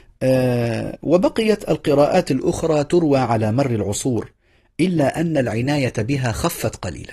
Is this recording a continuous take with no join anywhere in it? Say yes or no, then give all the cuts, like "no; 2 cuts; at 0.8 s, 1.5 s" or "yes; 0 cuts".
yes; 0 cuts